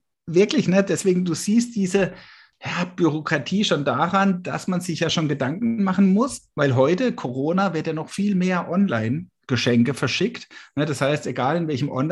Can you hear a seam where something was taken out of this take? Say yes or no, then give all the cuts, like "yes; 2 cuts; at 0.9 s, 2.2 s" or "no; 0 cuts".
no; 0 cuts